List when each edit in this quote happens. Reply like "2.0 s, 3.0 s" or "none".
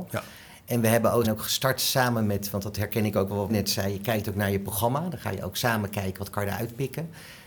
1.2 s, 3.5 s